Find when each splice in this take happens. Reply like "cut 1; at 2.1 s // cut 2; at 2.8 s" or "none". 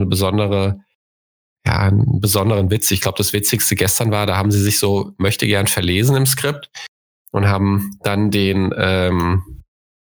none